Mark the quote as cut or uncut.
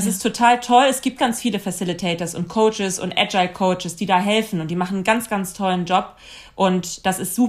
cut